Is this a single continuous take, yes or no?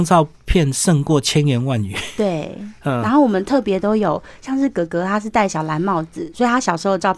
yes